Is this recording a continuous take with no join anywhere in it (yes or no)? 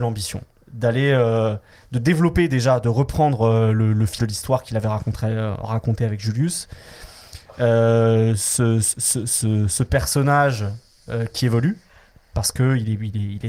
no